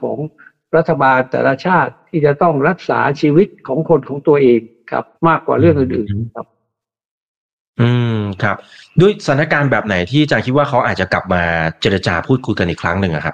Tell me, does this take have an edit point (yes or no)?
yes